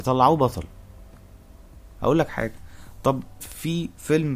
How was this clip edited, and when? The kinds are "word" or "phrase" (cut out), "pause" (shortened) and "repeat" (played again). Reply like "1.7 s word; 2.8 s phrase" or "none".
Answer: 2.0 s phrase; 3.4 s word